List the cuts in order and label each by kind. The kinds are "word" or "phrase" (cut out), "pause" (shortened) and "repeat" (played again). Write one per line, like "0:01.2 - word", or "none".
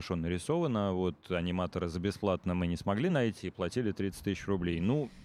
none

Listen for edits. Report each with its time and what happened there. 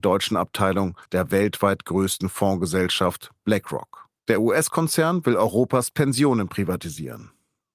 0:01.1 - pause
0:04.2 - pause

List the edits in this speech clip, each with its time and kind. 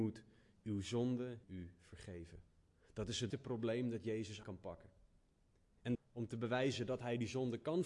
0:01.4 - word
0:03.3 - word
0:04.4 - word
0:05.9 - word

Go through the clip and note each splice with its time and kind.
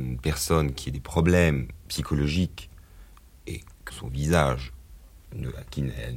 0:03.9 - word

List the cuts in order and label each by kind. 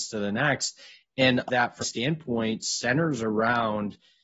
0:01.5 - phrase
0:01.8 - word

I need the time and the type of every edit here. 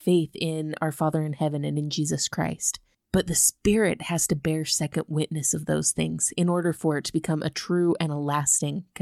none

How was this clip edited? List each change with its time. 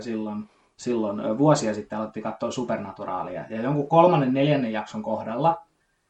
none

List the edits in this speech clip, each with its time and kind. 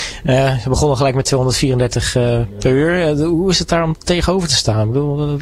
none

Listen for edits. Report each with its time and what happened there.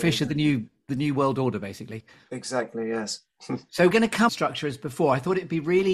0:03.3 - pause
0:03.9 - word
0:04.3 - phrase

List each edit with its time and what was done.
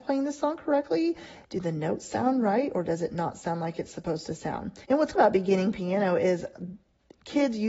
0:04.8 - pause
0:05.2 - word

